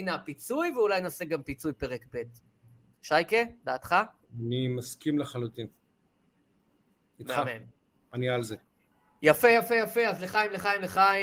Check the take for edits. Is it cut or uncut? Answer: uncut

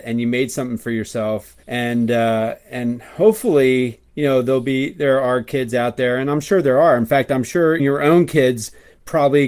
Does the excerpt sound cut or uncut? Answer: cut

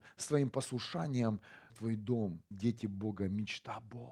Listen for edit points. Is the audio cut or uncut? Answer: cut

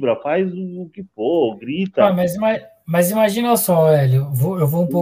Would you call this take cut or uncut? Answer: uncut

